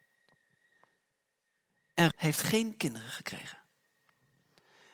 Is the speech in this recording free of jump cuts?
no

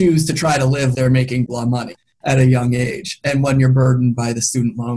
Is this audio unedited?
no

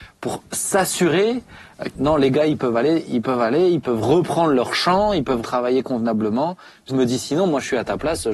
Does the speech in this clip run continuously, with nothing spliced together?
no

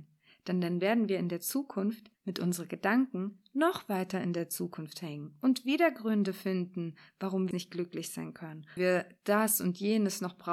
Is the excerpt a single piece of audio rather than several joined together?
no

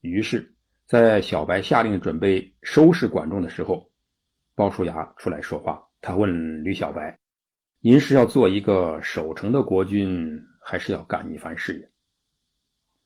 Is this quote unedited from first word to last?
no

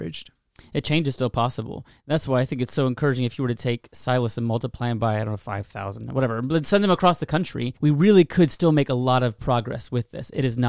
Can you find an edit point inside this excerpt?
yes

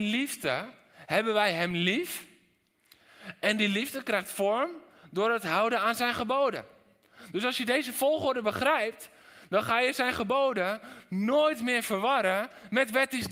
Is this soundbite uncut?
yes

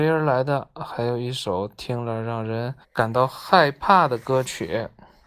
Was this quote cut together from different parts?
yes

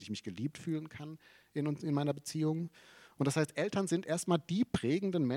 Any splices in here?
no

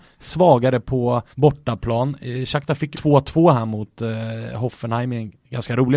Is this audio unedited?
no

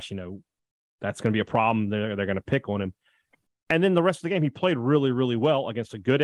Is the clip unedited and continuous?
yes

